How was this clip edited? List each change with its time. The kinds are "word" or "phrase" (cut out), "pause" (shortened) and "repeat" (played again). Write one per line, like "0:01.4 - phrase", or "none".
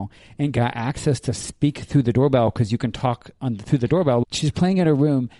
none